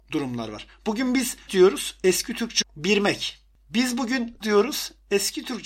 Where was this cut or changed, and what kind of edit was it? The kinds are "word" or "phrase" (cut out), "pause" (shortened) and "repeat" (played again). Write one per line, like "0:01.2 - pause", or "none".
0:01.5 - word
0:02.6 - word
0:04.4 - word